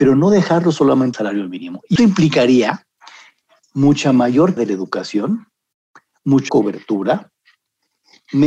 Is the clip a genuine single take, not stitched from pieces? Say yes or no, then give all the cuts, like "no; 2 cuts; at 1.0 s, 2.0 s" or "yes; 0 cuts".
no; 5 cuts; at 1.1 s, 2.0 s, 3.6 s, 4.6 s, 6.5 s